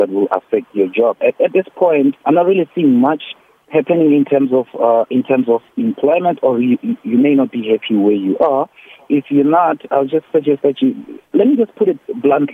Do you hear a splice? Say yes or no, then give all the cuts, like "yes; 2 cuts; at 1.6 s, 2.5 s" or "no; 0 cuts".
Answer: yes; 2 cuts; at 2.2 s, 11.3 s